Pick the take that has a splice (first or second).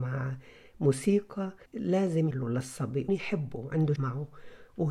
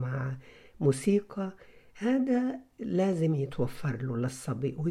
first